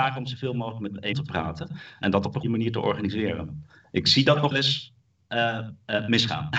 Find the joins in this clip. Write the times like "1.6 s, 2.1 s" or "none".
1.1 s, 2.4 s, 4.5 s